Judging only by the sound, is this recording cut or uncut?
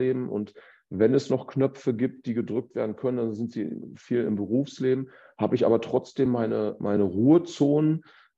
uncut